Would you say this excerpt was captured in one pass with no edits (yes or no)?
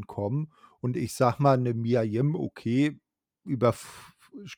yes